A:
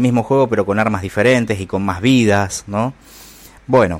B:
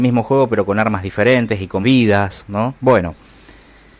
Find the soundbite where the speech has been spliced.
B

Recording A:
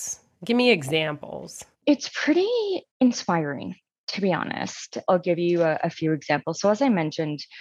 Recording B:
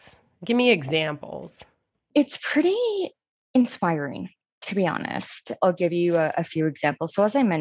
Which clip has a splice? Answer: A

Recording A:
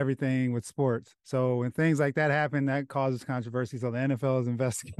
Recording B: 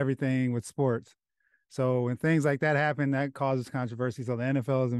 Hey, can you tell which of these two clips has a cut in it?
A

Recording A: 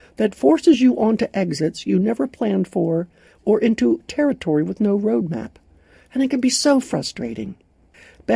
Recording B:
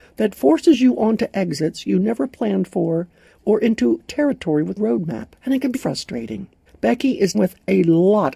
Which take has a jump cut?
B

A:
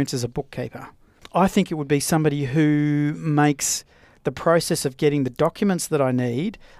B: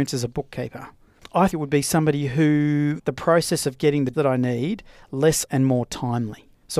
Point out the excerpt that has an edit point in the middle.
B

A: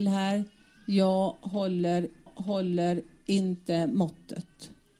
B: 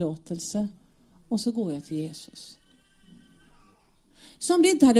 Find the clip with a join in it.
A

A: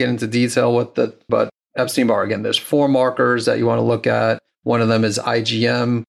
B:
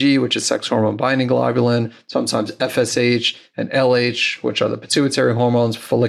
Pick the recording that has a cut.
A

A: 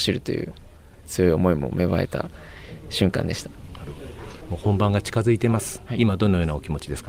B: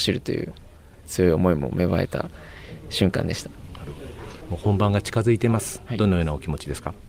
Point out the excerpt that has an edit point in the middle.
B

